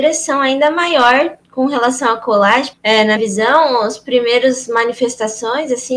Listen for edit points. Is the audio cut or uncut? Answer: cut